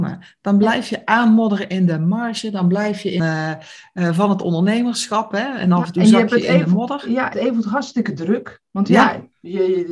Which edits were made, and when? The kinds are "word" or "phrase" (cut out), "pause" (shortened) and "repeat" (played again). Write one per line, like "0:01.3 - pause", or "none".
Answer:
0:03.2 - phrase
0:07.3 - phrase